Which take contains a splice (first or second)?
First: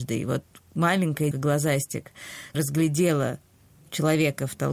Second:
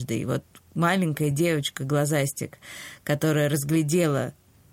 first